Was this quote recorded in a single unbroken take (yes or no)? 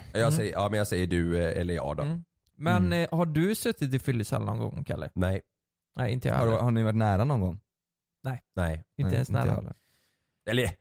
yes